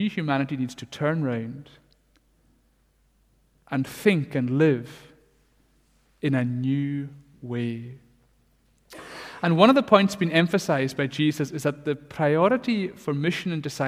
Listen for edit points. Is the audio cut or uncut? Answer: uncut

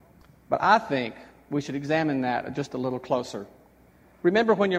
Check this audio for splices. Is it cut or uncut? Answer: uncut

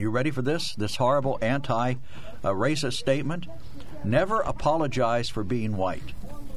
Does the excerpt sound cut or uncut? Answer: uncut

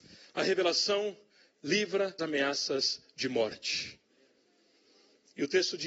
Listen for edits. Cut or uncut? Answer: cut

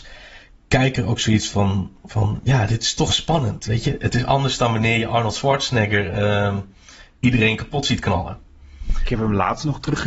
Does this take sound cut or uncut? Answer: uncut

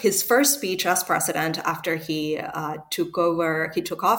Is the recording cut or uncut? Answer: uncut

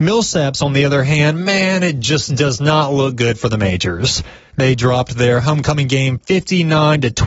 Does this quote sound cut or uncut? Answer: uncut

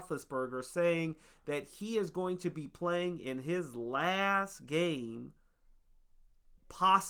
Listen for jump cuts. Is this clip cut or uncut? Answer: uncut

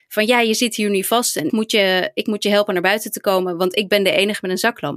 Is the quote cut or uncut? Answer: cut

